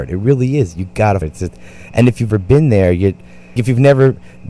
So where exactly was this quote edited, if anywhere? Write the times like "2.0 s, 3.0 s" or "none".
1.2 s, 2.3 s, 3.6 s

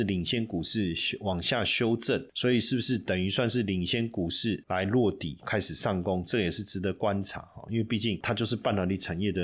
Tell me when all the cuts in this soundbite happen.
5.4 s

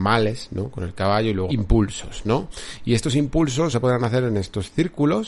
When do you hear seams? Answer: 1.5 s, 3.7 s

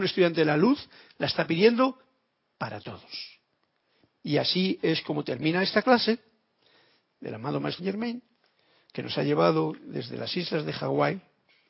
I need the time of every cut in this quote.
7.8 s

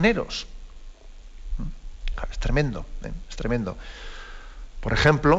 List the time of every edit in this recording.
none

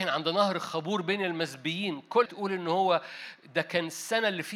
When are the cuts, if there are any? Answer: 2.2 s

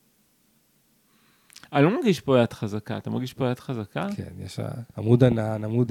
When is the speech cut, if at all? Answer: 4.9 s

